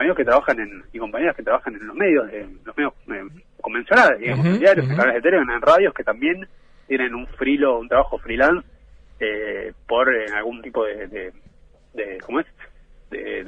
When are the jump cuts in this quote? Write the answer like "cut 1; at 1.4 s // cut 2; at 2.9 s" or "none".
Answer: cut 1; at 2.6 s

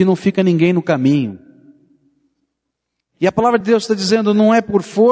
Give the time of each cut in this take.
none

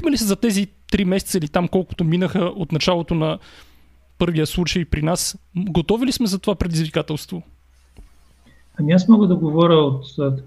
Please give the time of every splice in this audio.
none

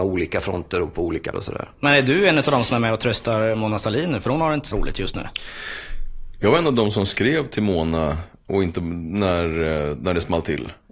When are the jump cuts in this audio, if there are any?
cut 1; at 1.3 s // cut 2; at 4.7 s

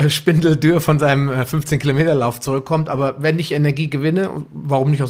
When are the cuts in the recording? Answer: none

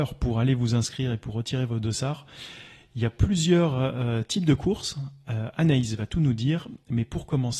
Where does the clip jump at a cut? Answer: none

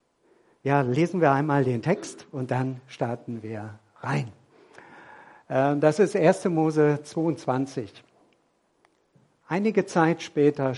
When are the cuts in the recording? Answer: none

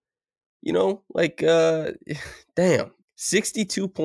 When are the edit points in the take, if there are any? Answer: cut 1; at 3.0 s

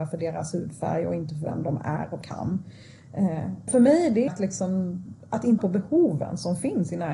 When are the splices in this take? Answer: cut 1; at 2.2 s // cut 2; at 3.7 s // cut 3; at 4.3 s // cut 4; at 5.6 s

